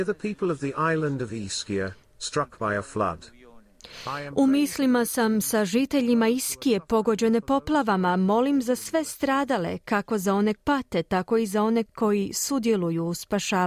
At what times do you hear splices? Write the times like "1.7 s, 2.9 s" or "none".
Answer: 10.6 s, 11.9 s